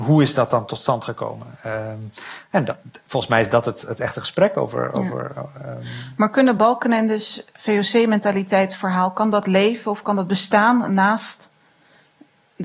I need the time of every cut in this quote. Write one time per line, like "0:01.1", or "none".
none